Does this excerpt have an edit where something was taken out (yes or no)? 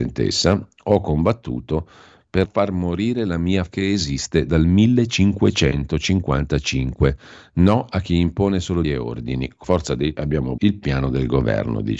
yes